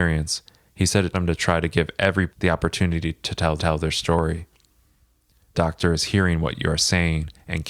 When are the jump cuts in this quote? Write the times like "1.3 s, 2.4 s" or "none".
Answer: 1.1 s, 2.3 s, 3.6 s, 5.5 s